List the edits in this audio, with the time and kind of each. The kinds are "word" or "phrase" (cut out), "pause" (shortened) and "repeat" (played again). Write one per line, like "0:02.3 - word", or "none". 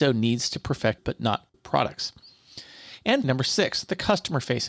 0:01.0 - word
0:01.5 - word
0:03.2 - word